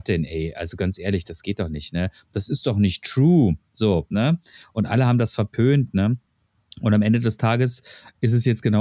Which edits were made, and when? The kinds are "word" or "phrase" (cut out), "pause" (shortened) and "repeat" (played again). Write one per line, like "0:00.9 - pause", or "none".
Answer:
none